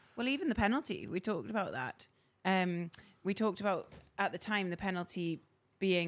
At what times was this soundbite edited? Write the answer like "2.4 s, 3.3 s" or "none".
none